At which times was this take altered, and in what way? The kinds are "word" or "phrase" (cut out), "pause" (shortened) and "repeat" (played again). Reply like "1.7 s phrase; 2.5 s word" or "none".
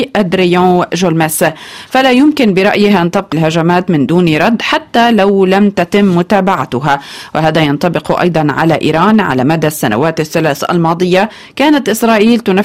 3.3 s word